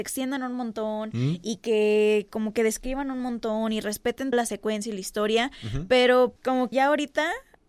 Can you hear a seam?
yes; 3 cuts; at 4.3 s, 6.4 s, 6.7 s

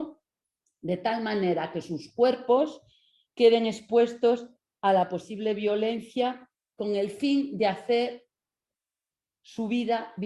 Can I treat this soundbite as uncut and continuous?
yes; 0 cuts

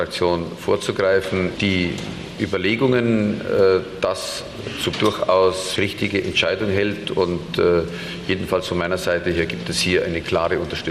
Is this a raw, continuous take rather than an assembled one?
no; 3 cuts; at 1.5 s, 4.9 s, 5.8 s

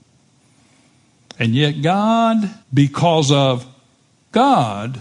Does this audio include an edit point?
yes; 1 cut; at 2.6 s

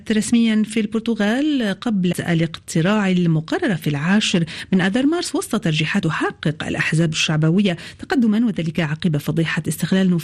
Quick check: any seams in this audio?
yes; 2 cuts; at 2.1 s, 6.0 s

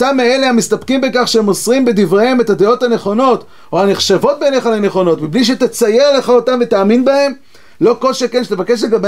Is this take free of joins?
yes; 0 cuts

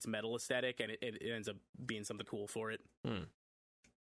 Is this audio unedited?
no; 1 cut; at 2.2 s

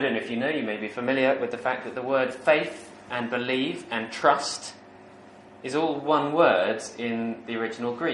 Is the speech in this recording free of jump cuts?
yes; 0 cuts

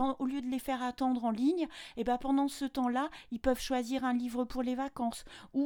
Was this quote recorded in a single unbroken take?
yes; 0 cuts

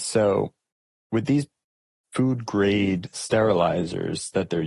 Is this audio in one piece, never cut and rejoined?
yes; 0 cuts

